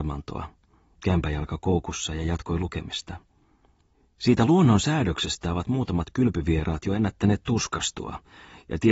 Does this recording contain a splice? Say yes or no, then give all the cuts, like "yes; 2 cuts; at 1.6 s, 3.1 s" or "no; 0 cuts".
no; 0 cuts